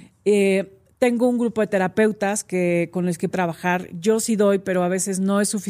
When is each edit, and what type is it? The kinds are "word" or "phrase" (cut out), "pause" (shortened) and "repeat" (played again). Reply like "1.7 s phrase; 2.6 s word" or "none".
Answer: 3.3 s word